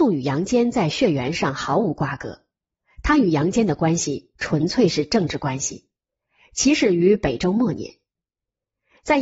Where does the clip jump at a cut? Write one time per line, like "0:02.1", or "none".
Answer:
none